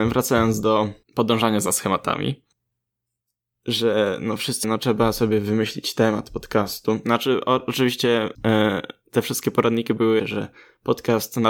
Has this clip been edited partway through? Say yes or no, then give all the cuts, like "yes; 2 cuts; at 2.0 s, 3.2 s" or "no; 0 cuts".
yes; 4 cuts; at 1.0 s, 4.6 s, 8.3 s, 10.2 s